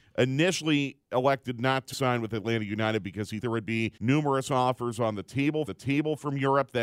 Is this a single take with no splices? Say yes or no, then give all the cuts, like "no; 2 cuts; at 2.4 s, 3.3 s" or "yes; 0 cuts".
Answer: no; 4 cuts; at 1.9 s, 3.4 s, 4.0 s, 5.7 s